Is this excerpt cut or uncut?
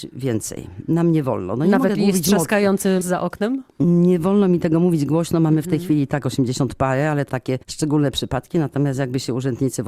cut